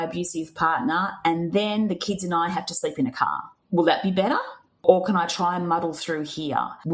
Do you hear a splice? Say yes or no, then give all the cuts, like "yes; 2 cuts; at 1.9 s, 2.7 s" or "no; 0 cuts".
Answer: no; 0 cuts